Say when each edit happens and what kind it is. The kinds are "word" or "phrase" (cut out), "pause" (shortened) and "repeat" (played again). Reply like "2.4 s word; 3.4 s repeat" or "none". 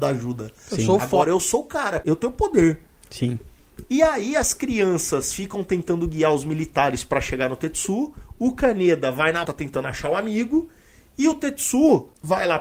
9.4 s word